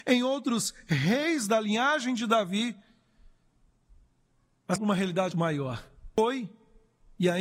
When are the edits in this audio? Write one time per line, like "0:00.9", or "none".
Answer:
0:04.8
0:05.3